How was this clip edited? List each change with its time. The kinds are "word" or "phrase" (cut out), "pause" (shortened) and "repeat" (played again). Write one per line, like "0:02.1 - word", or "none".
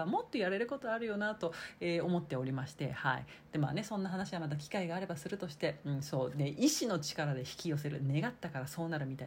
none